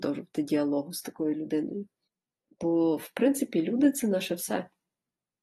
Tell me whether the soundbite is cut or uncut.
cut